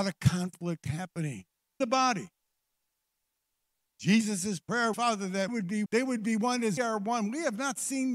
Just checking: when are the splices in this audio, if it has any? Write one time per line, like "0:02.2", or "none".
0:01.8
0:04.9
0:05.5
0:05.9
0:06.8